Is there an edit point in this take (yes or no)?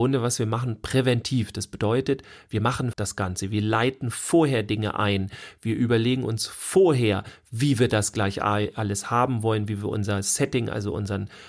yes